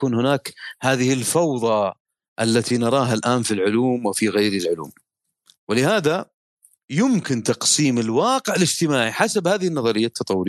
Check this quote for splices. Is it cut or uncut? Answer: uncut